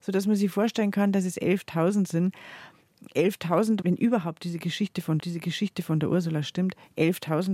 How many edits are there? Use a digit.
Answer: 2